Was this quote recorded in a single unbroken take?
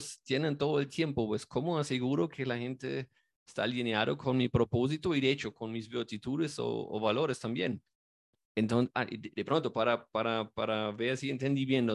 yes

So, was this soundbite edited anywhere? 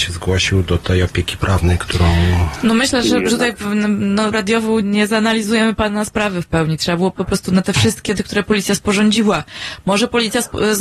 yes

